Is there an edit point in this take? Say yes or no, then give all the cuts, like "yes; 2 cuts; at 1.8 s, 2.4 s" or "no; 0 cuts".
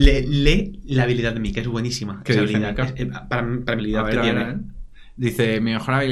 yes; 1 cut; at 3.8 s